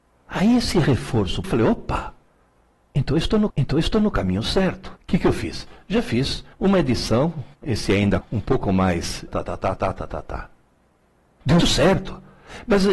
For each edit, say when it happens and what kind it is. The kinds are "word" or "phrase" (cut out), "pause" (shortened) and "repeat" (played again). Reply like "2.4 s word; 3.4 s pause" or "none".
1.4 s word; 3.5 s repeat; 5.0 s pause; 6.5 s pause; 7.5 s pause; 8.2 s phrase; 9.3 s word; 9.8 s repeat; 11.6 s word